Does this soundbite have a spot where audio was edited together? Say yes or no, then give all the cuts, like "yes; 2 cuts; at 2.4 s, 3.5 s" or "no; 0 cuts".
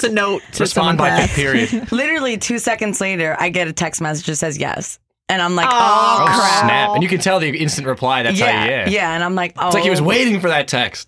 no; 0 cuts